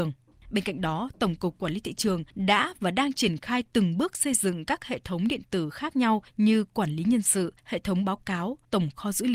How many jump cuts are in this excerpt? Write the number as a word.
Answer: zero